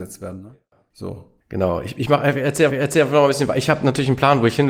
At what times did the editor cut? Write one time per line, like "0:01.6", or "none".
0:01.4
0:02.7